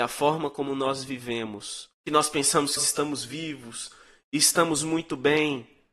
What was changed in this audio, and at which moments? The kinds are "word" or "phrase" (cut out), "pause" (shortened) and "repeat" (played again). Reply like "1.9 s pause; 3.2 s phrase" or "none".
1.9 s pause; 2.8 s word